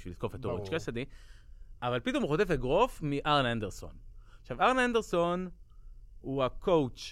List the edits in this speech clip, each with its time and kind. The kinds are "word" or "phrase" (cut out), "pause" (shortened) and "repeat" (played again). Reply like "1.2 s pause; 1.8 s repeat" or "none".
none